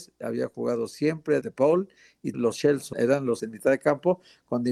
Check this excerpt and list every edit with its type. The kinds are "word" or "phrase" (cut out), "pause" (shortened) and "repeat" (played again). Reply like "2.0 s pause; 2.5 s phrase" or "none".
1.4 s word; 2.3 s word; 2.9 s word; 3.4 s word